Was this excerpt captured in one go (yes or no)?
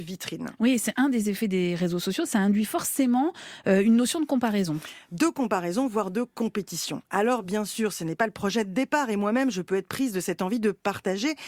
yes